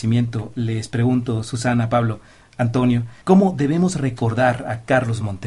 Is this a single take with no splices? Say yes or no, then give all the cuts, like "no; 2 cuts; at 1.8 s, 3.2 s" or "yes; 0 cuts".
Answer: no; 1 cut; at 3.2 s